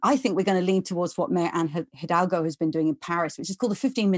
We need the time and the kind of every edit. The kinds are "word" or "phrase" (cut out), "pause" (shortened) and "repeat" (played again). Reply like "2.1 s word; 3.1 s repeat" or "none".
none